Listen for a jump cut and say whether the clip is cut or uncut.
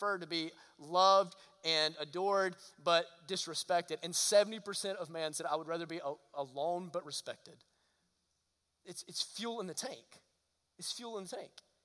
uncut